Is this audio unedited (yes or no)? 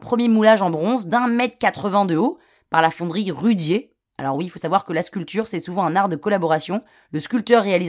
yes